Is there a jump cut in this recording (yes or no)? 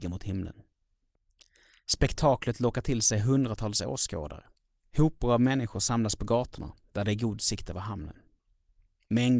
no